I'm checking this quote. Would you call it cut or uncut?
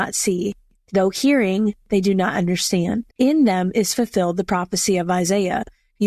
cut